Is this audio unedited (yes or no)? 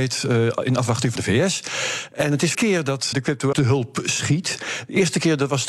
no